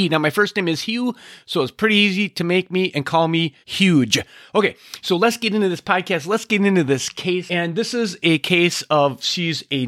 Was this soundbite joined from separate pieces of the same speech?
yes; 1 cut; at 3.6 s

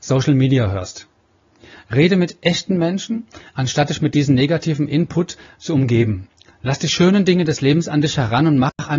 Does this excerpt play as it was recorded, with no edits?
yes; 0 cuts

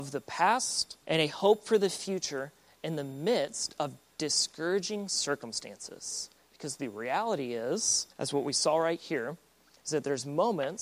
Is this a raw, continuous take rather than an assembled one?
no; 3 cuts; at 1.0 s, 6.4 s, 8.1 s

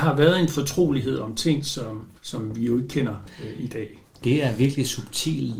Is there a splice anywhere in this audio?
yes; 1 cut; at 2.2 s

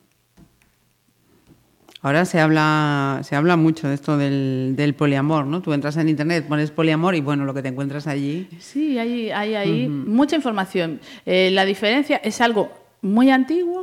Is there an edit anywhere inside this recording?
no; 0 cuts

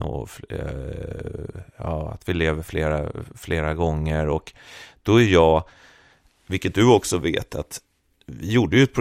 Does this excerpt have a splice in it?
no; 0 cuts

